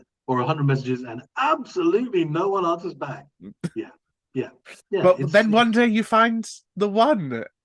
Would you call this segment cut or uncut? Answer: cut